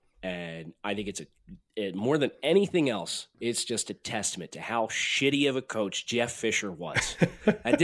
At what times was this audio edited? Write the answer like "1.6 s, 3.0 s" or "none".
3.3 s